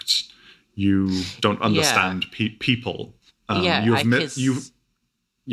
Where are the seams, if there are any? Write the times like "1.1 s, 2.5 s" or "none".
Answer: 3.3 s